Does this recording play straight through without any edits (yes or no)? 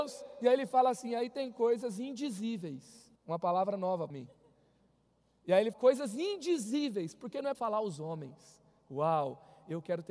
no